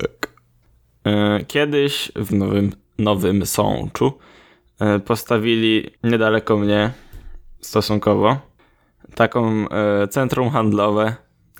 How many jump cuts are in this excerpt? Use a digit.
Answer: 3